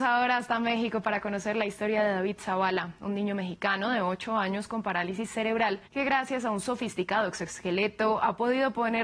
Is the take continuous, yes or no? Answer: no